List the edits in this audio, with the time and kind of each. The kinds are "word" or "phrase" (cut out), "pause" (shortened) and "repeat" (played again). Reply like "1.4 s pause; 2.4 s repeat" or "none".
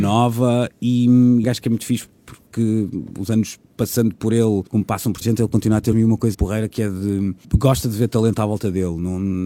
1.4 s phrase; 4.7 s pause; 5.2 s phrase; 5.9 s phrase; 6.3 s word; 7.4 s pause